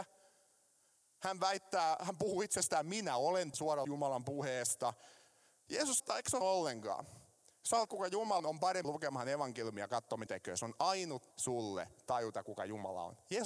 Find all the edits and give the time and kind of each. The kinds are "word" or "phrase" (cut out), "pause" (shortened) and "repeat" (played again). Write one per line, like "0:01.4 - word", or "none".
0:03.5 - word
0:03.8 - word
0:06.0 - word
0:06.4 - word
0:07.9 - word
0:08.4 - word
0:08.8 - word
0:10.3 - word
0:11.3 - word